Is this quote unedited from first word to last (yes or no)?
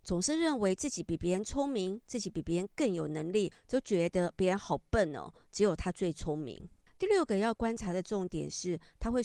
no